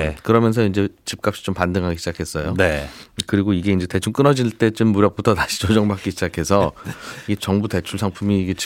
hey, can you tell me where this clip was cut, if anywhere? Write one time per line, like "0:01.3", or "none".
none